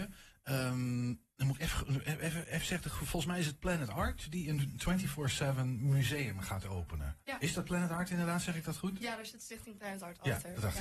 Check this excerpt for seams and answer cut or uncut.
cut